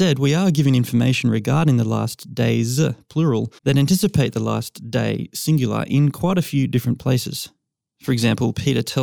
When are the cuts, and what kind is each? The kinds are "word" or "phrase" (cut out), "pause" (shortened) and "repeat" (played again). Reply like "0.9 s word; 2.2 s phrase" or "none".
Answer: 3.6 s pause